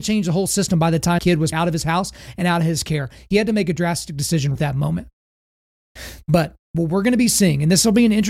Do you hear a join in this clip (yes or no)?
yes